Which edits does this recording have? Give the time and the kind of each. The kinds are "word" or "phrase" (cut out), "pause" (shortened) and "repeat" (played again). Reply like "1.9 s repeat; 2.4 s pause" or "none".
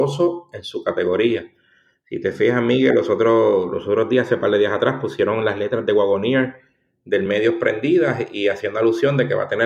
none